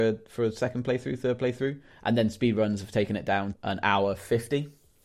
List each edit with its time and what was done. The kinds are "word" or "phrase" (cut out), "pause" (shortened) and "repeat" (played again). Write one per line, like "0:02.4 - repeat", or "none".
0:03.5 - word